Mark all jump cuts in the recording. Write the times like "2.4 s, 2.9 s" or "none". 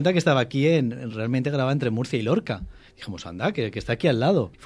none